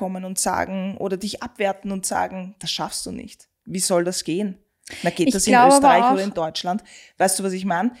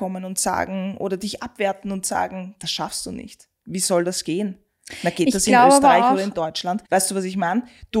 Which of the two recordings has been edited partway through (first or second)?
second